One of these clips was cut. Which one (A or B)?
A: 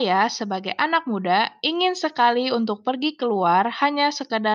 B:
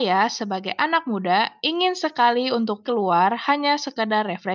B